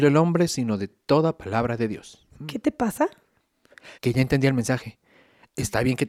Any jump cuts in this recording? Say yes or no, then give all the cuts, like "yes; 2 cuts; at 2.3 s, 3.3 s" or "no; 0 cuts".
yes; 2 cuts; at 2.3 s, 3.9 s